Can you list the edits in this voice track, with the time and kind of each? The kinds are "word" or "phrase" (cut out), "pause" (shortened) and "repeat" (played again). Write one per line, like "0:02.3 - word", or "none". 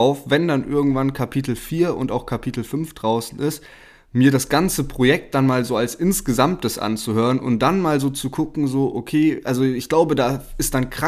none

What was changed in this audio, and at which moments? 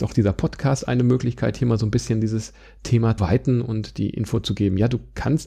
0:03.2 - word

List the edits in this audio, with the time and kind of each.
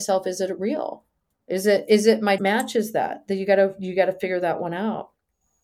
0:02.4 - word

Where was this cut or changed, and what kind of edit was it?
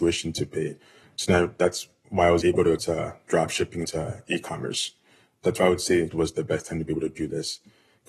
0:02.8 - word
0:03.8 - word
0:06.1 - word

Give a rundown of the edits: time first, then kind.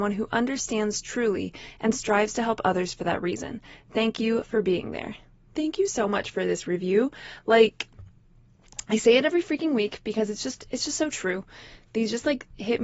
none

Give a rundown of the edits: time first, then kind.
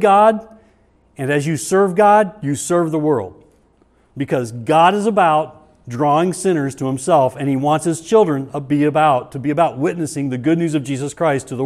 none

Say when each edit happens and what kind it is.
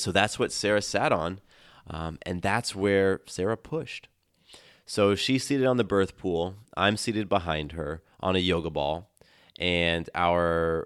none

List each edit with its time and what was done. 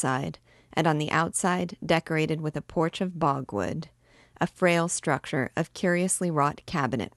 none

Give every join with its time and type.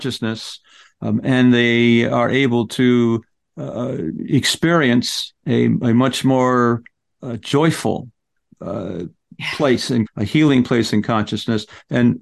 0:05.4 - pause
0:10.1 - word

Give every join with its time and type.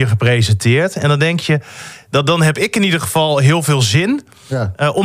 none

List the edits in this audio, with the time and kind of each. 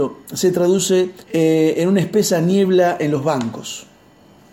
0:01.2 - pause

